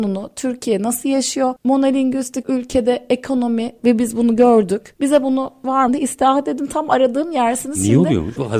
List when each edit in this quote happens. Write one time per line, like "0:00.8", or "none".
0:03.8
0:05.9